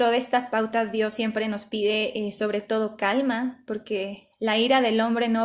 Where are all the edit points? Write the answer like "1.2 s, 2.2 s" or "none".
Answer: none